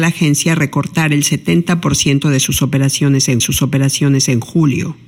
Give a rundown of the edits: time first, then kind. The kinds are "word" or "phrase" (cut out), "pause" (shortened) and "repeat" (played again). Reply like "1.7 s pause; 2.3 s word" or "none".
3.4 s repeat